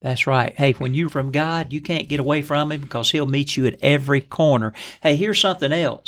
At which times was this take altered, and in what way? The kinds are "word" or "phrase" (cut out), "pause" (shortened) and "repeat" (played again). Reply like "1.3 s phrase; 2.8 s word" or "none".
1.1 s word